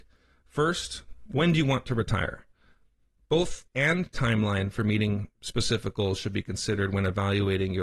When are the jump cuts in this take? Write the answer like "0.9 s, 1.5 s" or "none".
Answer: 3.7 s